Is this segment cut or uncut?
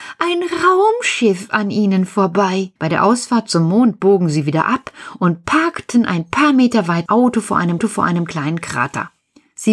cut